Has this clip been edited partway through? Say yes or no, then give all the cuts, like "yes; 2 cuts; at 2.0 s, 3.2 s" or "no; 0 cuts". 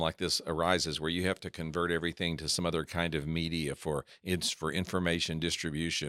no; 0 cuts